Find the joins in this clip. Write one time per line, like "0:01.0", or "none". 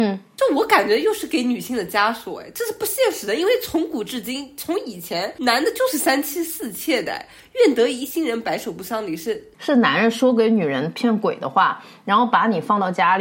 none